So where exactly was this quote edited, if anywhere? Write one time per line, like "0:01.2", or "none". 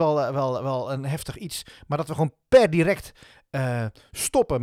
none